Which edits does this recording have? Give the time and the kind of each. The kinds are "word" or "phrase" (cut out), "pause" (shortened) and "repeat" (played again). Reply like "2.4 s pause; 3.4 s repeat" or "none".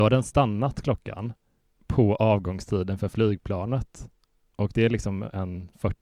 none